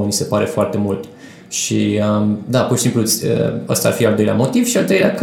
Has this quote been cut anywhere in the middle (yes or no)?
no